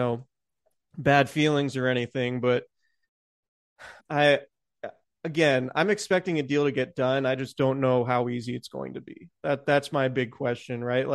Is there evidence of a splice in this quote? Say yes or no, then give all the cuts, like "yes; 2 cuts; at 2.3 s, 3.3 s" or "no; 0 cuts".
yes; 1 cut; at 4.0 s